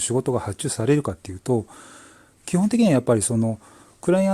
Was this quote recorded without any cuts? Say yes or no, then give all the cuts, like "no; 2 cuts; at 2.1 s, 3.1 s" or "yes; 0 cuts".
yes; 0 cuts